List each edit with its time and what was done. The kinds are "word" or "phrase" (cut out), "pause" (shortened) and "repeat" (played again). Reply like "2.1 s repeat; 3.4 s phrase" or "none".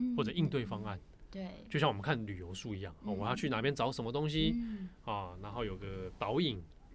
none